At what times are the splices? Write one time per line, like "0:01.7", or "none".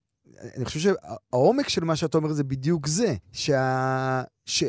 0:03.2